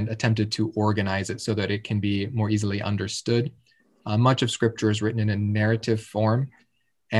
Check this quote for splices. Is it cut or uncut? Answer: uncut